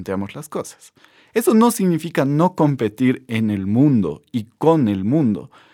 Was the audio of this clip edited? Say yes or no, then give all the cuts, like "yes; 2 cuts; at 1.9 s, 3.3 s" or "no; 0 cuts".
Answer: no; 0 cuts